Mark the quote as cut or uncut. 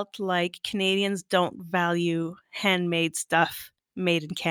uncut